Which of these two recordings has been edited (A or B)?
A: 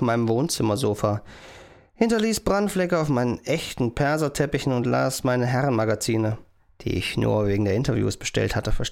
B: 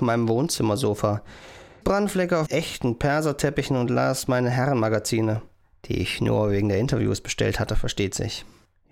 B